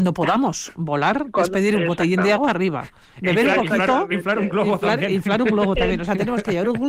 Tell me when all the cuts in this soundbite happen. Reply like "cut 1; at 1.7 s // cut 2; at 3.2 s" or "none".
none